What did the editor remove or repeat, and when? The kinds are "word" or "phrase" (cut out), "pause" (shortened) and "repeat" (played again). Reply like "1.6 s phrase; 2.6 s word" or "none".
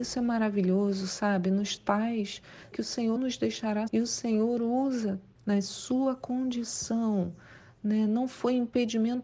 1.8 s word; 2.7 s word; 3.2 s word; 3.9 s word; 5.4 s word